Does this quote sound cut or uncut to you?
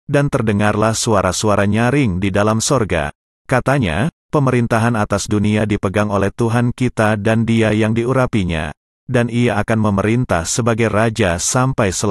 uncut